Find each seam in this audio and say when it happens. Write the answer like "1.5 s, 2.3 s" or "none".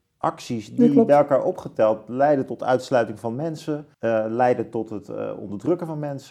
3.9 s